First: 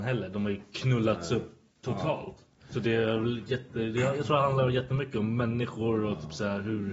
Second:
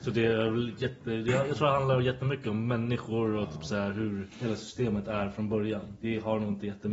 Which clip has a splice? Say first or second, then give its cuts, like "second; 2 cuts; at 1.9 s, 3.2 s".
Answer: second; 1 cut; at 4.3 s